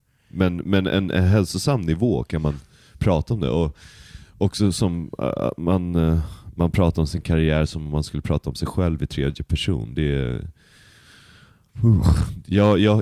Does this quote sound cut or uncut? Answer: uncut